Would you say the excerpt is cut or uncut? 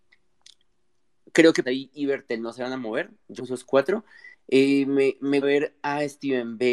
cut